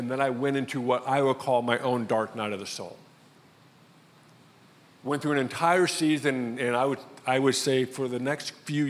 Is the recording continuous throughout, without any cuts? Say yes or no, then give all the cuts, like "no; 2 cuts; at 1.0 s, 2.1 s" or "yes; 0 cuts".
yes; 0 cuts